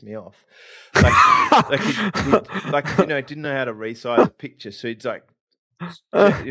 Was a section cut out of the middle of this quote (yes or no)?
no